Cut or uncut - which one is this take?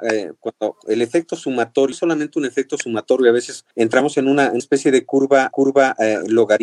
cut